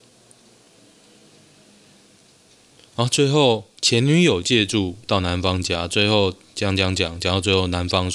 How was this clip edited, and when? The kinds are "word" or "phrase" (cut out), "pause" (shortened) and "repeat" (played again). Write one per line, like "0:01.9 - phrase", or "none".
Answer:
0:03.8 - pause

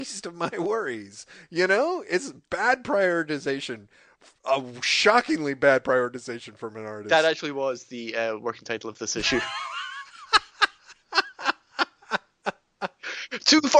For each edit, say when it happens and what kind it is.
none

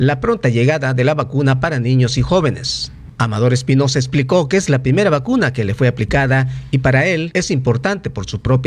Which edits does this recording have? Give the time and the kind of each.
none

